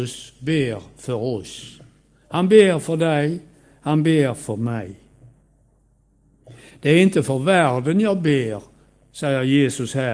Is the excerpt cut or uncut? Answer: uncut